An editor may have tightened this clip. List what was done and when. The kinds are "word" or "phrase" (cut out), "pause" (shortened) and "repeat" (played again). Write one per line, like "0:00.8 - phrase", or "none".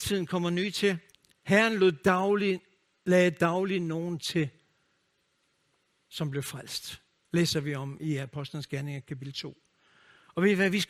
0:01.1 - pause